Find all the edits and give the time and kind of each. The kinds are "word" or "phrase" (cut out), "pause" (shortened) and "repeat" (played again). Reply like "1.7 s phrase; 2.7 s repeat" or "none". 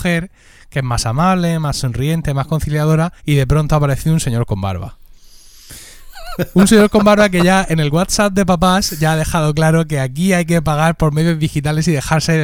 3.2 s pause